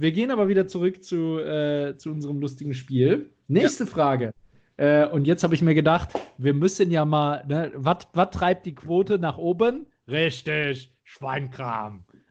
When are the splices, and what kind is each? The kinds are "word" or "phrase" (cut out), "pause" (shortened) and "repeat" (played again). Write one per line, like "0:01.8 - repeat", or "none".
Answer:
none